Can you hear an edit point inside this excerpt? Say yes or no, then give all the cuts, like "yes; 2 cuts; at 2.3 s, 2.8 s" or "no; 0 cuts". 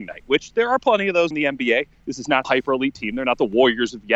yes; 2 cuts; at 1.3 s, 2.4 s